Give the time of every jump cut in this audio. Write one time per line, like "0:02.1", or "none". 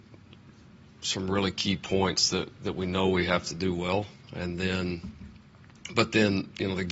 none